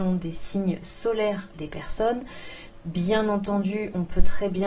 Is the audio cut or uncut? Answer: cut